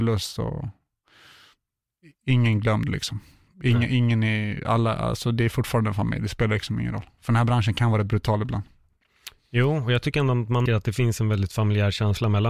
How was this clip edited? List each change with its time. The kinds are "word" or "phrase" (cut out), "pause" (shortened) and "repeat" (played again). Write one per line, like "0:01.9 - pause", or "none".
0:10.7 - word